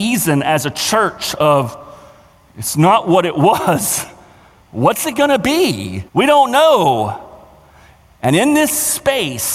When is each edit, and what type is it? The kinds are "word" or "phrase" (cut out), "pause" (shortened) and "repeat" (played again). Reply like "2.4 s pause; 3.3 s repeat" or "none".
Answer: 6.1 s pause